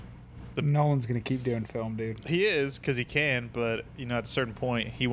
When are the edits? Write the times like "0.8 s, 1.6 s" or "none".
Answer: none